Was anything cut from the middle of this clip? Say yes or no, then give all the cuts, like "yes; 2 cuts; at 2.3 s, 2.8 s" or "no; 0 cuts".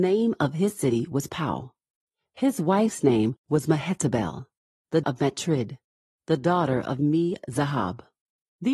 yes; 2 cuts; at 3.4 s, 5.0 s